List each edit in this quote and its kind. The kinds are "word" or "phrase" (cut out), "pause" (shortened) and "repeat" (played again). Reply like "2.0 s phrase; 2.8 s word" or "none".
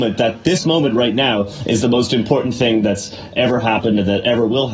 none